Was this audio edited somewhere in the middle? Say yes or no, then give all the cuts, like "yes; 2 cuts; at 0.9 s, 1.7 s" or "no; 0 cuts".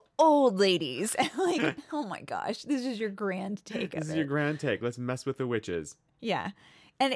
no; 0 cuts